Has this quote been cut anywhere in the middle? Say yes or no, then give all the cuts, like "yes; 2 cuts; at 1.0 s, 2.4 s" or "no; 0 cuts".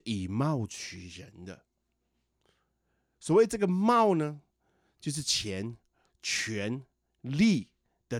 no; 0 cuts